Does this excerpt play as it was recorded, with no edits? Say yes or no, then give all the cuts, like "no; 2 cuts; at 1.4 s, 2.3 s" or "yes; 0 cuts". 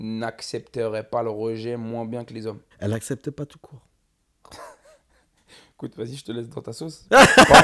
no; 1 cut; at 2.7 s